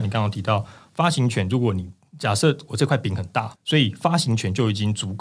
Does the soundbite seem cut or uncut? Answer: cut